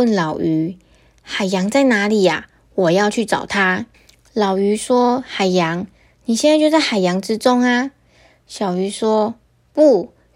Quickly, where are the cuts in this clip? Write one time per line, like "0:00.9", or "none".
0:03.9
0:09.4

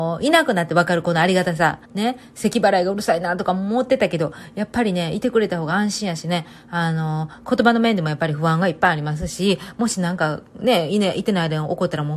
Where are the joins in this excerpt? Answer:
0:01.9

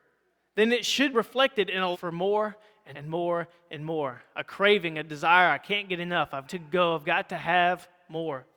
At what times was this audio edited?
0:01.1
0:01.9
0:02.9
0:06.4

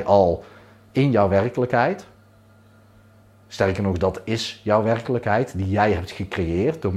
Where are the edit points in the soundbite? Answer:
none

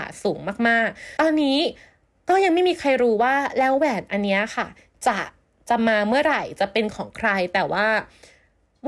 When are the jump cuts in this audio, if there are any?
0:01.2

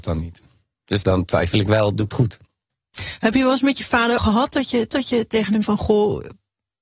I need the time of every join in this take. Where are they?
0:01.0
0:02.1
0:04.2
0:04.9
0:05.6

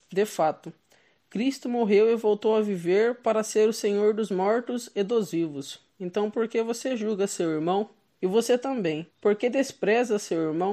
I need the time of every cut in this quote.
0:05.9
0:08.1
0:09.1

